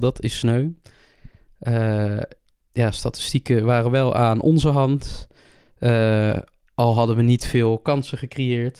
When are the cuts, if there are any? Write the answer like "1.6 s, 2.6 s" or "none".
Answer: none